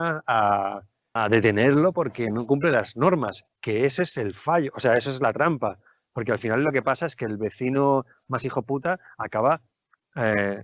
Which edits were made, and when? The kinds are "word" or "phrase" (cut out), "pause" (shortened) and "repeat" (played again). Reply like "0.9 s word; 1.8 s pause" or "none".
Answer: 1.2 s word; 3.6 s word